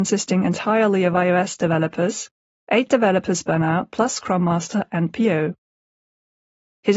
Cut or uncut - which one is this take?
uncut